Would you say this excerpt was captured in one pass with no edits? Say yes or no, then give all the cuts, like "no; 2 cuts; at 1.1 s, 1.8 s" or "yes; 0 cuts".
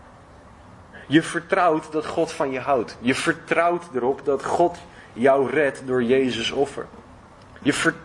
yes; 0 cuts